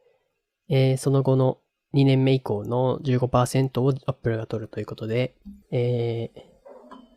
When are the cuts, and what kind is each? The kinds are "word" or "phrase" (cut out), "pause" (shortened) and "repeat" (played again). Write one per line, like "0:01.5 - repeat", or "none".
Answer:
0:01.7 - pause
0:05.6 - pause